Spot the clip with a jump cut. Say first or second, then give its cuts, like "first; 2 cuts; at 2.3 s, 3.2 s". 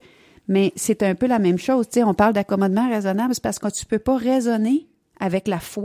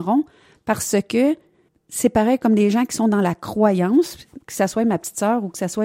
second; 2 cuts; at 1.7 s, 4.4 s